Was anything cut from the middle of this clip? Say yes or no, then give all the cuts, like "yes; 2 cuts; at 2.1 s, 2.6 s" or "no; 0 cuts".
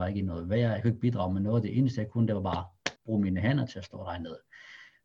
yes; 1 cut; at 3.0 s